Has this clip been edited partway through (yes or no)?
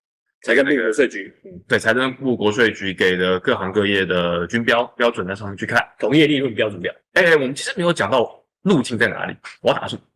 no